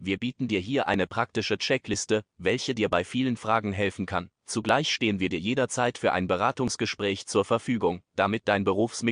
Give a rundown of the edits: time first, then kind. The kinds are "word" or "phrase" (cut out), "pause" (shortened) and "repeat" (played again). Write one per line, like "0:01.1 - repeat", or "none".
0:04.3 - pause
0:08.1 - pause